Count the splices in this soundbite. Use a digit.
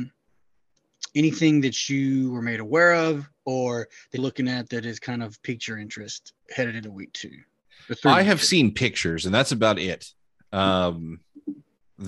2